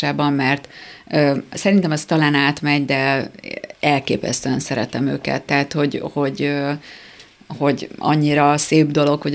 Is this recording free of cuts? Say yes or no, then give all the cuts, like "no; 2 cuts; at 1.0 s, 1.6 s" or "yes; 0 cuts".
yes; 0 cuts